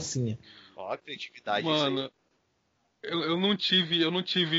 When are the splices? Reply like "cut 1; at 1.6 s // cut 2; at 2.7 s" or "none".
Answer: none